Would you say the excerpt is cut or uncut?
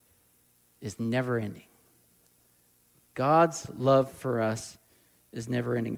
uncut